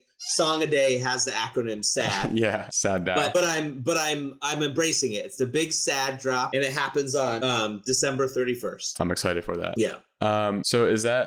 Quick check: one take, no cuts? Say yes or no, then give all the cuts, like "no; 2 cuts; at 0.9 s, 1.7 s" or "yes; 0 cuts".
yes; 0 cuts